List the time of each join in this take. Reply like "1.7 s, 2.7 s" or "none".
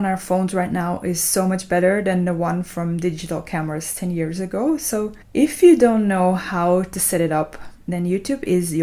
5.2 s